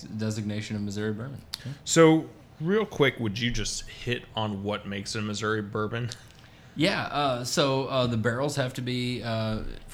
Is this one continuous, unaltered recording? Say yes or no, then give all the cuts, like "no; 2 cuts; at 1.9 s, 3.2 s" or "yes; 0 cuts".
yes; 0 cuts